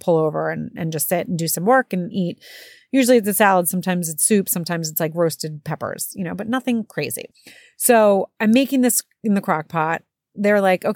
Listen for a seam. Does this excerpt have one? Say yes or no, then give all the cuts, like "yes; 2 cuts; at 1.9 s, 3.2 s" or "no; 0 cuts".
no; 0 cuts